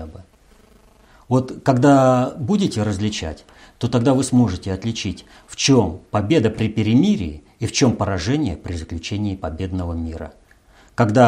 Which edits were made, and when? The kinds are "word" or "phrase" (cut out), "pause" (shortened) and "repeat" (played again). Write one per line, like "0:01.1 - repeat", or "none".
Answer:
none